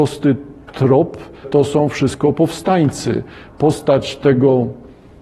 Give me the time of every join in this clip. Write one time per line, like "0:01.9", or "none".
0:01.4